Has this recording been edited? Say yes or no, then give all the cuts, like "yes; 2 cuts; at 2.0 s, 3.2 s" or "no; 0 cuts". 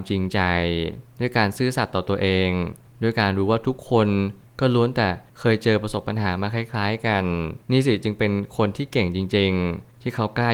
yes; 1 cut; at 7.6 s